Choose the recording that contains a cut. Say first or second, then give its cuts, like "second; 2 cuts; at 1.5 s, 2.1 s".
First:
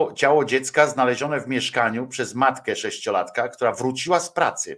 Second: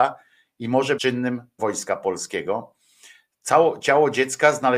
second; 2 cuts; at 1.0 s, 1.6 s